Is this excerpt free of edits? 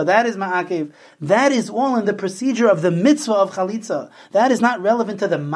yes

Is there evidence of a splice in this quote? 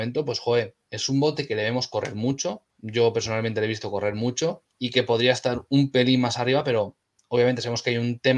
yes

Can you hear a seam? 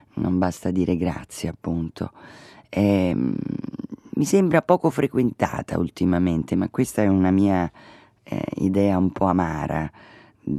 no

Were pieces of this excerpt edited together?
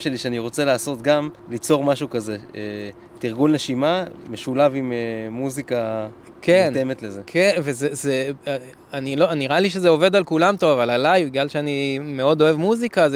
yes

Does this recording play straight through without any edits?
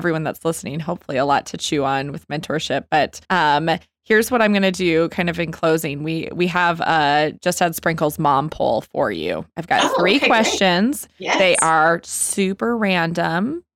no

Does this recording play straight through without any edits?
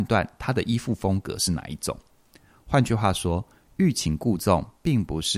yes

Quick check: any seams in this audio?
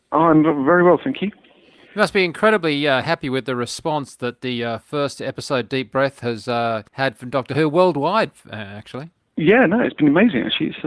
yes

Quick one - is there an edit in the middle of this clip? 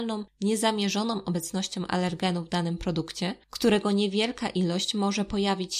no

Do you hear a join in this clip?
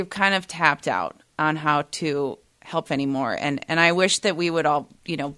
yes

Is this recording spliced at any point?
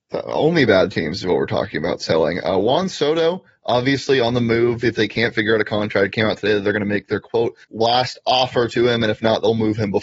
yes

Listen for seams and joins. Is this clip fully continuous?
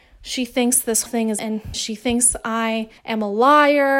no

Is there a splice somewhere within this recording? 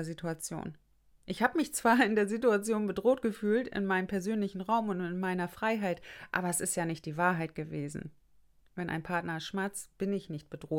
no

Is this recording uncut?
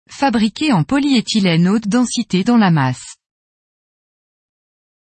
no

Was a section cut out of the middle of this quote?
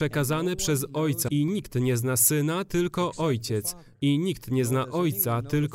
yes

